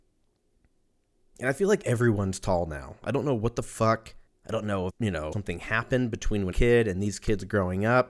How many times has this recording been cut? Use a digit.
4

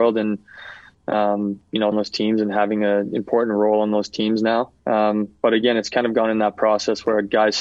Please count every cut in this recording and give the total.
2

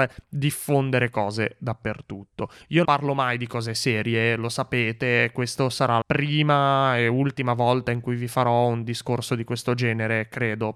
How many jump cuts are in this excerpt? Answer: 2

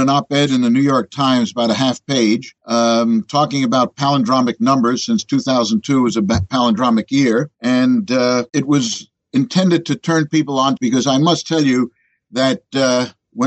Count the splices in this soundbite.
4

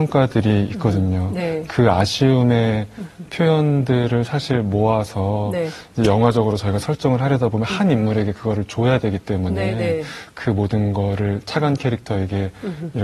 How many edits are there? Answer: 0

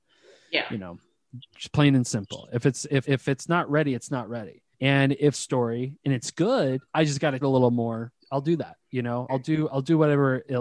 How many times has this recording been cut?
7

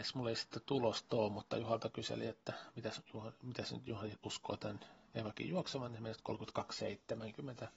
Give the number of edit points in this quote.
0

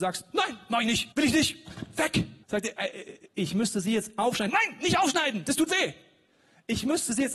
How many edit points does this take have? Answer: 2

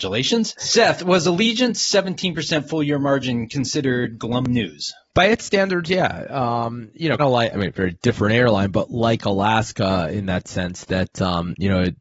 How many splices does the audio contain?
1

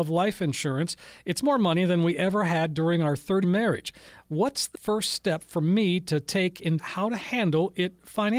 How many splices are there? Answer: 4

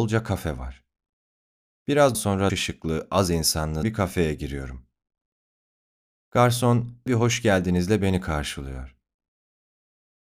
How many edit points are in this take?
4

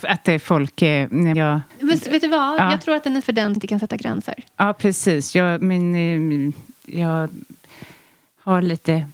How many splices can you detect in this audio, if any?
5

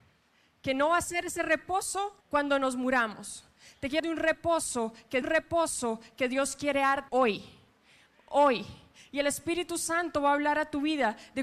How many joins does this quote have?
4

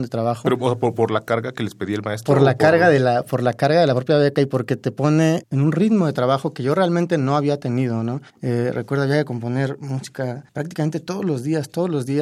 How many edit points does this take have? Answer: 2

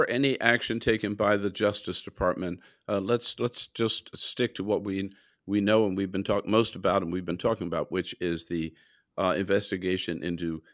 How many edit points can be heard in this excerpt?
0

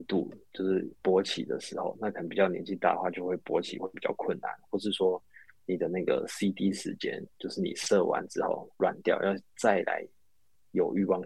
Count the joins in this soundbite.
0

